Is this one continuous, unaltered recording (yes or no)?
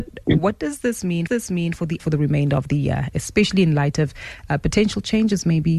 no